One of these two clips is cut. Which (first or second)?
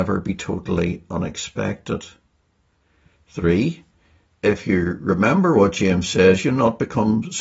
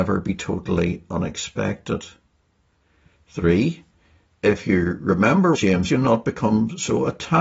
second